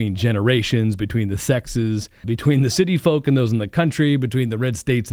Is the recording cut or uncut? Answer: cut